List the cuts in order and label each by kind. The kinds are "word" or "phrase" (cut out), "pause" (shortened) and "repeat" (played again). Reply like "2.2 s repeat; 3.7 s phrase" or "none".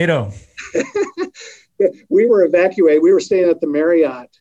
none